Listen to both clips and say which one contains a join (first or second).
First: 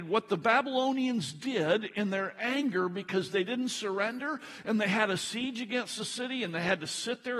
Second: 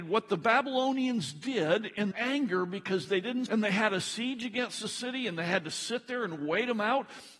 second